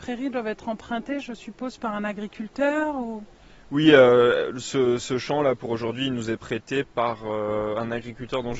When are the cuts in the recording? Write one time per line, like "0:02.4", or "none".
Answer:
none